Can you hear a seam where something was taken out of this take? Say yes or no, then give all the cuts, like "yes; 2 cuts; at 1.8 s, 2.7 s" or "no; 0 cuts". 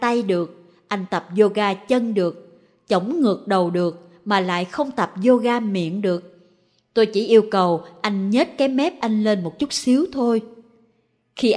no; 0 cuts